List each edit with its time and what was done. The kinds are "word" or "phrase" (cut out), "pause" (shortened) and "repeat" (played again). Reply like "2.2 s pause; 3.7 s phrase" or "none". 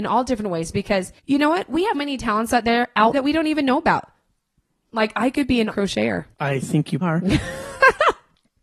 1.2 s pause; 1.9 s word; 3.1 s word; 5.7 s word; 6.3 s pause; 7.0 s word